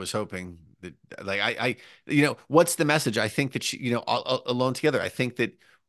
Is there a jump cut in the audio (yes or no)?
no